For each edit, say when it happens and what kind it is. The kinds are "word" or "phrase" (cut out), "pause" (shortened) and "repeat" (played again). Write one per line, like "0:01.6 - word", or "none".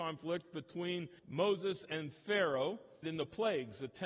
0:01.2 - pause
0:03.0 - phrase